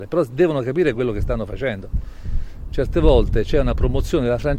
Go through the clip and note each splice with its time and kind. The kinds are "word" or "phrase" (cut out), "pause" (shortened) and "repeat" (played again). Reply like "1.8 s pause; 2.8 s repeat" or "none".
none